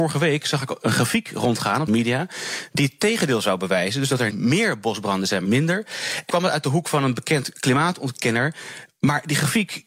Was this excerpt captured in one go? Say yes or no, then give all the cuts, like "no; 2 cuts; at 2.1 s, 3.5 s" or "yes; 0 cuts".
no; 4 cuts; at 1.9 s, 4.3 s, 5.4 s, 6.3 s